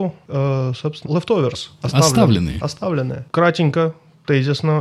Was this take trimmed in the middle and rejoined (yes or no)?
yes